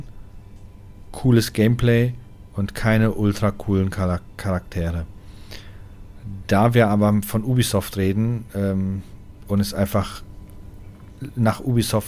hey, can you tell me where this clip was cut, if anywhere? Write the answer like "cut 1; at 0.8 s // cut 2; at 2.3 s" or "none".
none